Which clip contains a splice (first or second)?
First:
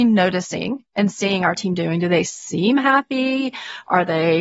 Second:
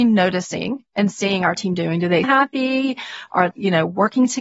second